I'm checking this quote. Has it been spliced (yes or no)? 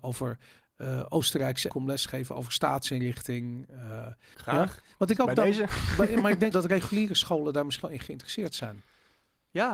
yes